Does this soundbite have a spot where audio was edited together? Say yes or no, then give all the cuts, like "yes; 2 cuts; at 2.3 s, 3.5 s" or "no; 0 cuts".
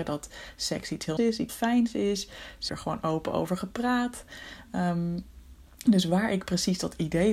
yes; 3 cuts; at 1.2 s, 1.5 s, 2.7 s